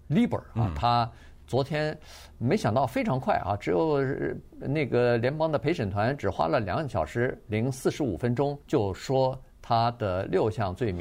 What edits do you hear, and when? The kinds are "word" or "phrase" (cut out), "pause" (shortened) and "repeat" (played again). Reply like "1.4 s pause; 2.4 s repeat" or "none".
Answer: 8.6 s pause